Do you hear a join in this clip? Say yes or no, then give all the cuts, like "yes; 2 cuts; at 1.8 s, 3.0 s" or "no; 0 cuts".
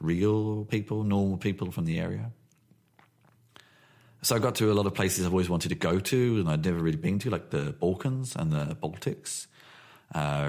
no; 0 cuts